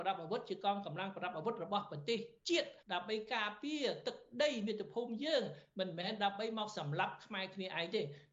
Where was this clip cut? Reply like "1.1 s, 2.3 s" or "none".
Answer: 2.8 s